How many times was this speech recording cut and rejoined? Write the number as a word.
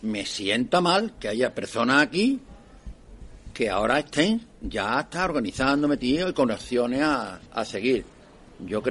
two